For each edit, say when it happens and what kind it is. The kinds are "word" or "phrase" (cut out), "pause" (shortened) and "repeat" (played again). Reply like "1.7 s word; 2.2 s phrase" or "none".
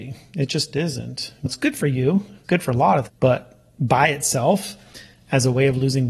1.5 s word; 2.4 s word; 3.1 s word